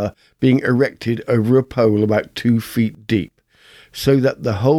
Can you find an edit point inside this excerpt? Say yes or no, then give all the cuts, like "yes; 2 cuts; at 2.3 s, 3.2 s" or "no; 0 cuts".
no; 0 cuts